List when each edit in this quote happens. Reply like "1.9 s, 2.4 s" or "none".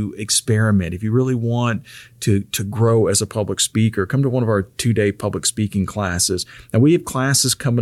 none